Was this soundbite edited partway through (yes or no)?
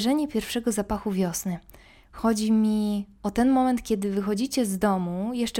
no